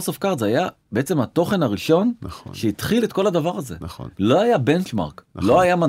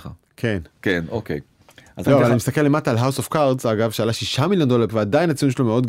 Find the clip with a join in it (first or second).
second